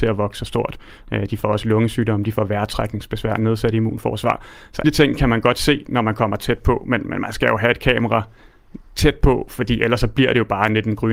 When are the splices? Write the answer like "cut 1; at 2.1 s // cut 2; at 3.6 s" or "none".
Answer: cut 1; at 4.8 s